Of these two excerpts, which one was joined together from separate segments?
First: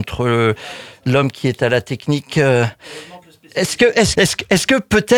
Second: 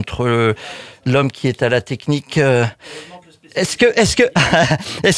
first; 1 cut; at 4.1 s

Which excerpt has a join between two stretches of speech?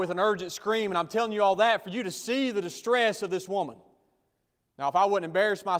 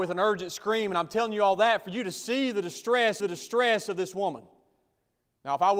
second; 1 cut; at 3.2 s

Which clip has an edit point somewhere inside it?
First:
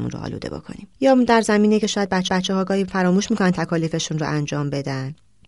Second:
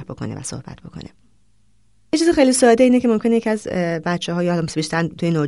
first; 2 cuts; at 0.9 s, 2.3 s

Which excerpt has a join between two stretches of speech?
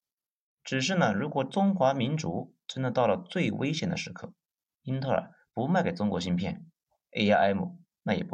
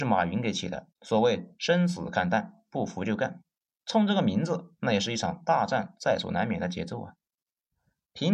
second; 1 cut; at 1.0 s

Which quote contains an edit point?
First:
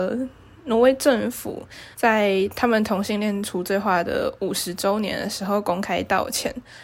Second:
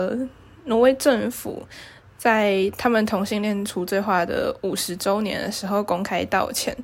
first; 1 cut; at 1.9 s

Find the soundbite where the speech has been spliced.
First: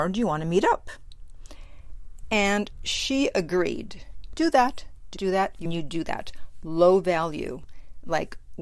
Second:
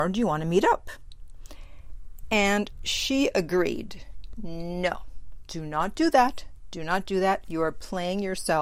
first; 3 cuts; at 4.4 s, 5.2 s, 5.7 s

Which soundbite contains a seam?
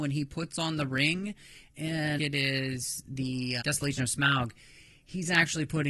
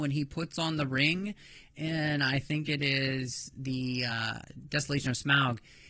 first; 2 cuts; at 2.2 s, 3.6 s

